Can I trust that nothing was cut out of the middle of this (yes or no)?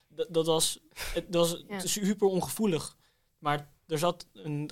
yes